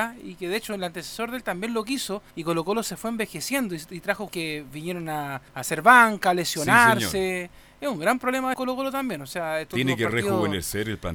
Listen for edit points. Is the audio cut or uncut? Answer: cut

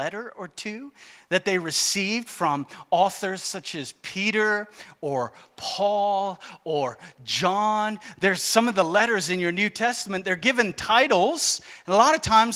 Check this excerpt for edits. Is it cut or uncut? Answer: uncut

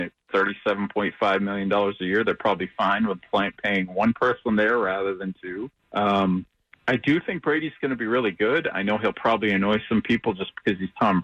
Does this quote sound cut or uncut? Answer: cut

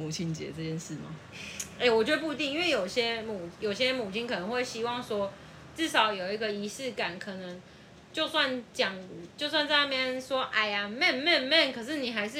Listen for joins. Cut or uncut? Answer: uncut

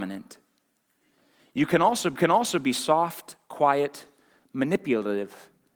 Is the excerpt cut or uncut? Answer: cut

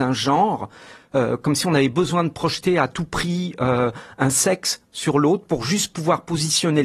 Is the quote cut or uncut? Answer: uncut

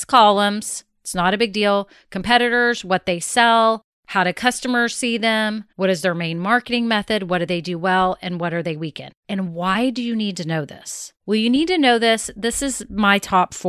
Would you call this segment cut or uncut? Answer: cut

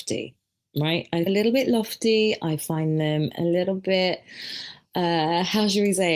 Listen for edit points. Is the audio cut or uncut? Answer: cut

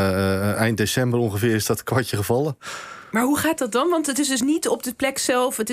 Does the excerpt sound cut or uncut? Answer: uncut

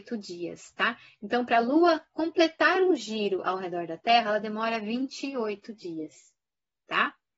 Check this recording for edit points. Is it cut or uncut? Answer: uncut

